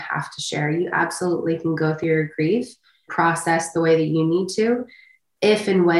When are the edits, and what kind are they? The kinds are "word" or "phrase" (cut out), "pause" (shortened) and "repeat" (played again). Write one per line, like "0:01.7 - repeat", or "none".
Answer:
0:03.1 - word